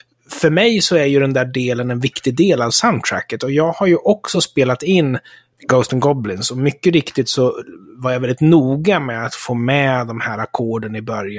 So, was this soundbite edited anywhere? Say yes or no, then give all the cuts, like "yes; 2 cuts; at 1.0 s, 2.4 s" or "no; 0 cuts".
no; 0 cuts